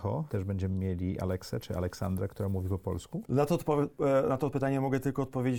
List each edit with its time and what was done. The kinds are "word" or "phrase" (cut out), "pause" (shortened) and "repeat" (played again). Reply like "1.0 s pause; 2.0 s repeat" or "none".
none